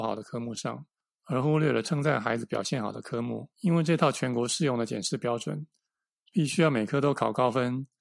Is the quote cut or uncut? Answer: cut